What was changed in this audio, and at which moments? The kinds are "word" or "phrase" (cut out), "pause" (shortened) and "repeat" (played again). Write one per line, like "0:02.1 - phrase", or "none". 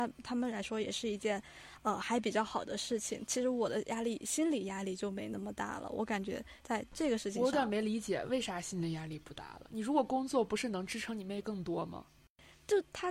none